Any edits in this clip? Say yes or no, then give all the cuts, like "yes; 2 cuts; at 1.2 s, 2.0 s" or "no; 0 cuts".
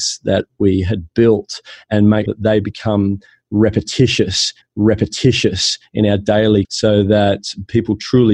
yes; 3 cuts; at 2.3 s, 4.6 s, 6.6 s